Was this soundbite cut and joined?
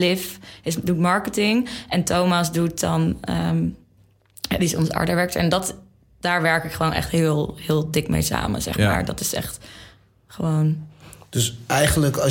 no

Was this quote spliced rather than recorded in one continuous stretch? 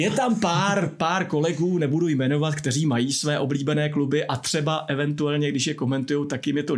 no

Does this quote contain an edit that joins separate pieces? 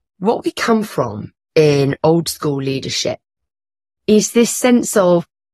no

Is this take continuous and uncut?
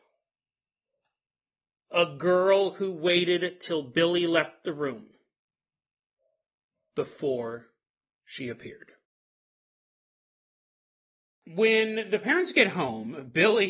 yes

